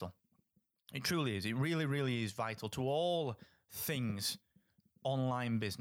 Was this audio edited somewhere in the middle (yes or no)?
no